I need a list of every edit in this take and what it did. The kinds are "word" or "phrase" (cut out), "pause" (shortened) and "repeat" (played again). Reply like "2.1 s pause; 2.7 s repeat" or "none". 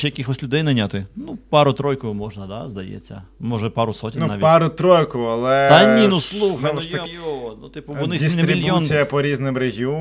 7.1 s word